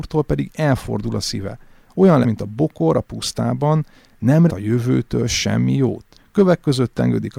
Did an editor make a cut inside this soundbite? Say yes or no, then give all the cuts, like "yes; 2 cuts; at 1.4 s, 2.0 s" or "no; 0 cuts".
yes; 3 cuts; at 2.2 s, 4.5 s, 6.2 s